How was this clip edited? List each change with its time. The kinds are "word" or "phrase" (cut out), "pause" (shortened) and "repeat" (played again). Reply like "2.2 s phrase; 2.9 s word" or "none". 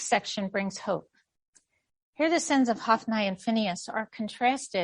none

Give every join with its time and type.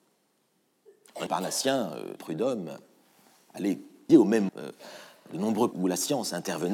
1.3 s word; 2.2 s word; 4.1 s word; 4.5 s word; 5.7 s word

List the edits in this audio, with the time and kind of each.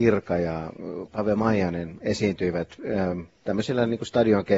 none

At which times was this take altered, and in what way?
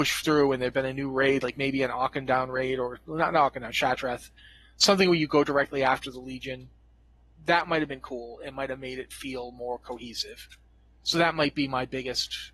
none

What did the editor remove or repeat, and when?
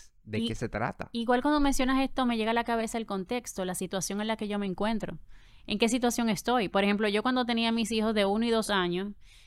none

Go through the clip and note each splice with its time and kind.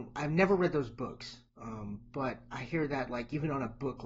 1.5 s pause

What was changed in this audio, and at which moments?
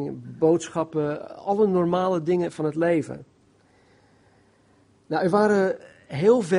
none

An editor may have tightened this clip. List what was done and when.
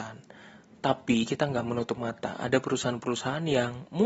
none

